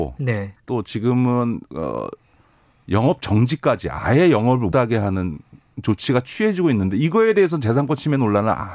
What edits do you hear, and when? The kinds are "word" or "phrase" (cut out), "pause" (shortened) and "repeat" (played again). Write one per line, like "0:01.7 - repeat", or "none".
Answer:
0:04.7 - word